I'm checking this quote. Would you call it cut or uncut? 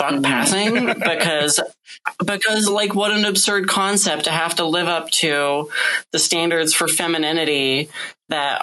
uncut